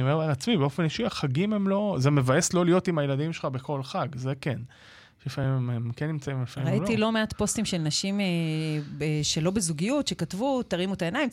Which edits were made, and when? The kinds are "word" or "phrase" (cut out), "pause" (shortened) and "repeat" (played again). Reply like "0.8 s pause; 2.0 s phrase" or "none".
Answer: none